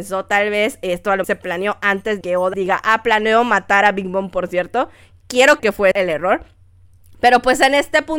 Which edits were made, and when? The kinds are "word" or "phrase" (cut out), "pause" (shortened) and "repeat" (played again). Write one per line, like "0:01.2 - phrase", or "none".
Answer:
0:01.2 - word
0:02.2 - word
0:02.5 - word
0:05.6 - word
0:05.9 - word